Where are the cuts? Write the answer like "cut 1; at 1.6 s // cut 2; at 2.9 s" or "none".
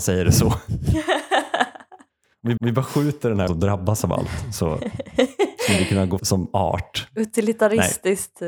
cut 1; at 2.6 s // cut 2; at 3.5 s // cut 3; at 6.2 s